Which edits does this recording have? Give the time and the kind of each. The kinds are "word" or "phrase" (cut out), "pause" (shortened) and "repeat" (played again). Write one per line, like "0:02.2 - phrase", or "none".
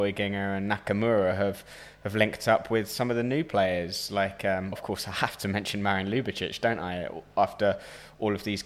0:04.7 - word